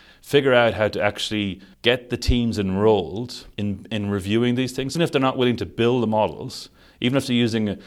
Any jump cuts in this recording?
yes; 3 cuts; at 1.7 s, 3.5 s, 4.9 s

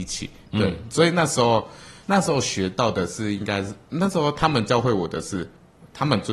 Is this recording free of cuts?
no; 1 cut; at 2.0 s

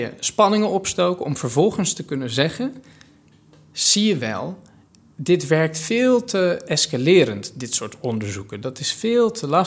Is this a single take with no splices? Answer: yes; 0 cuts

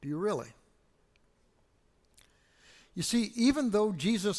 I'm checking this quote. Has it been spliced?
no; 0 cuts

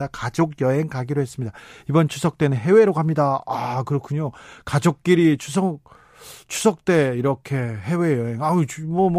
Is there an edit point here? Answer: no; 0 cuts

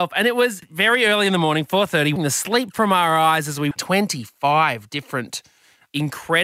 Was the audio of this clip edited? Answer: yes; 2 cuts; at 2.2 s, 3.7 s

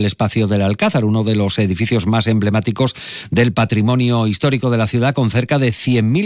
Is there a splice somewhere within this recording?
no; 0 cuts

